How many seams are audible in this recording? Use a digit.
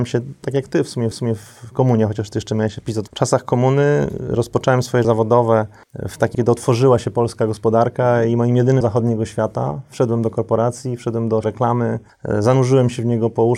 6